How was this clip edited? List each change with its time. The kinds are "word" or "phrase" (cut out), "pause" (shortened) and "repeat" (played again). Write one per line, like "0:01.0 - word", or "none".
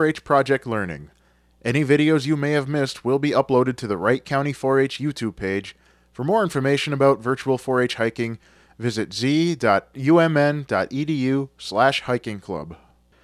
none